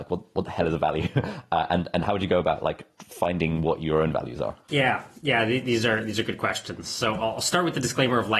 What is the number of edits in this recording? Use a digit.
1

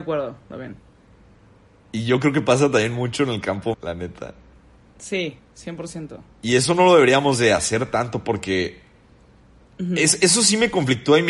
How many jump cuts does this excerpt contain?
1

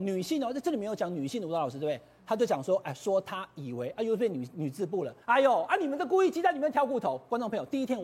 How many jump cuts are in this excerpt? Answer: 1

